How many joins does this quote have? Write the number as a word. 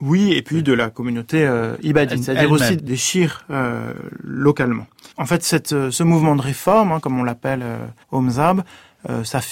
three